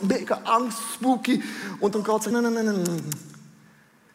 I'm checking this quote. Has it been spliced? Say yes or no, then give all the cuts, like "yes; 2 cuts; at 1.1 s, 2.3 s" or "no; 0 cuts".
yes; 2 cuts; at 1.9 s, 2.3 s